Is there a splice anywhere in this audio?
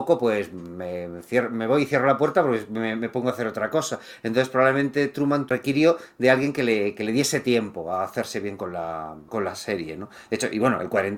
no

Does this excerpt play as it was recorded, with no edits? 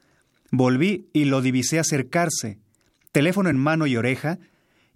yes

